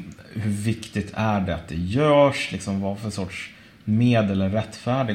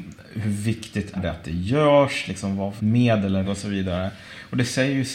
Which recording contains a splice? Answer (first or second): second